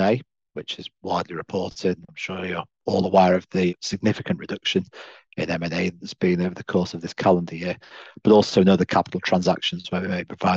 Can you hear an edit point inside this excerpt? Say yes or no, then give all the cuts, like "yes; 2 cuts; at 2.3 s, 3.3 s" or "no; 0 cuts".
no; 0 cuts